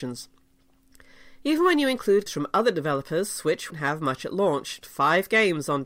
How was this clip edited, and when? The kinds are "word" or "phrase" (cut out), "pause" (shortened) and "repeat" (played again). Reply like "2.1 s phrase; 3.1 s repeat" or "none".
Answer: 2.3 s word; 3.7 s word; 4.8 s word